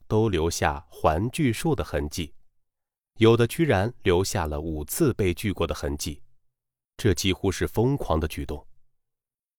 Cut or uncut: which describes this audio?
uncut